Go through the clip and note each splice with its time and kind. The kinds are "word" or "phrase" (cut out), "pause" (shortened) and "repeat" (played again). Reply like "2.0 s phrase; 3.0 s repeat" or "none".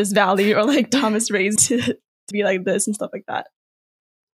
1.6 s word; 2.3 s word